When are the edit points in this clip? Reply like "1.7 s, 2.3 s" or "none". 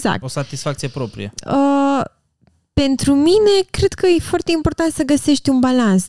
none